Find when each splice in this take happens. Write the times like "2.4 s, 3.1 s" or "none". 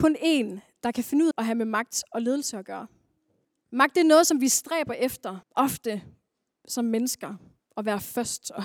1.3 s, 3.4 s, 5.4 s